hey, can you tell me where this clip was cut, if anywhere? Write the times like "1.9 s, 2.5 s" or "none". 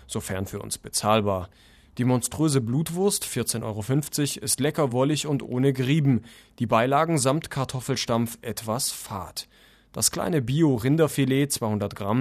none